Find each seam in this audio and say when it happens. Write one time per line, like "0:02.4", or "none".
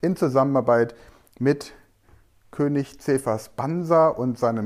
none